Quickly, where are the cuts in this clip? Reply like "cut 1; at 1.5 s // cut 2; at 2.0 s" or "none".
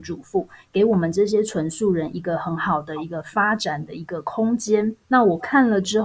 cut 1; at 5.0 s